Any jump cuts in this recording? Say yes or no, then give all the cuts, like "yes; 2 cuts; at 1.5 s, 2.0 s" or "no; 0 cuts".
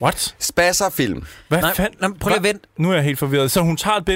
no; 0 cuts